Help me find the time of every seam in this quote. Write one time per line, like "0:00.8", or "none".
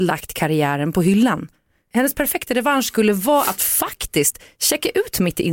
none